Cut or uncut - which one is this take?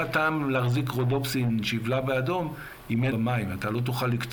cut